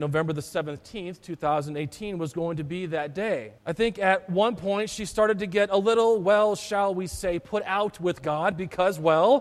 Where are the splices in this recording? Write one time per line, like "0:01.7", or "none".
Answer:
0:03.6